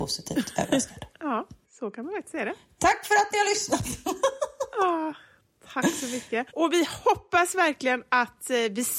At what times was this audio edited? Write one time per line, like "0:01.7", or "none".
0:06.5